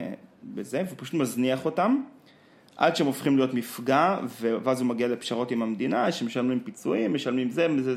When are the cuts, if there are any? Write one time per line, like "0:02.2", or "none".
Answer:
none